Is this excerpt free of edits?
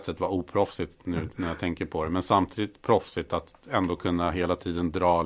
yes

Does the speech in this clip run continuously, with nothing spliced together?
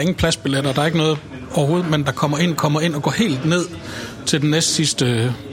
no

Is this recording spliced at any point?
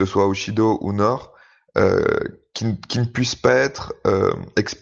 no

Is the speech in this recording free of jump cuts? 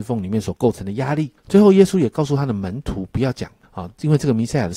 no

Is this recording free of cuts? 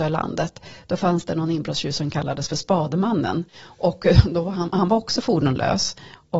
no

